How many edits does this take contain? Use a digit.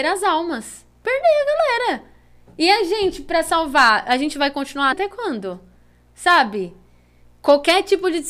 1